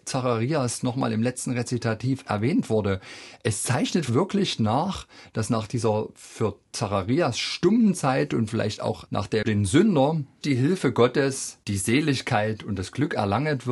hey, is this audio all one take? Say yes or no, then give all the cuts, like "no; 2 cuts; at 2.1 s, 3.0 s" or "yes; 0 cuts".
no; 3 cuts; at 4.1 s, 9.4 s, 10.4 s